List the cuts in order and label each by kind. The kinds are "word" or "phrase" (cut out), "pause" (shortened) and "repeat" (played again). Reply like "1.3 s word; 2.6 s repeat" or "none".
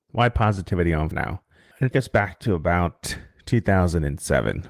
1.1 s word; 1.9 s word